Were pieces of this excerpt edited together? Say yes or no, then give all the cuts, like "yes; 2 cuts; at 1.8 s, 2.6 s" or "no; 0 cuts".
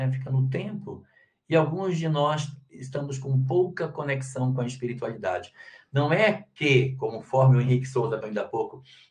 yes; 1 cut; at 8.2 s